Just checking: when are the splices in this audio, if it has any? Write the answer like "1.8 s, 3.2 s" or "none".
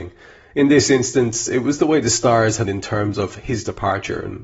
2.6 s